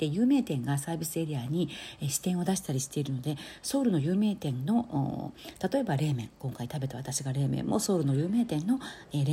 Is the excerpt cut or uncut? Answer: uncut